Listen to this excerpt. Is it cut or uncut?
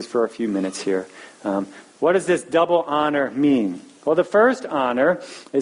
uncut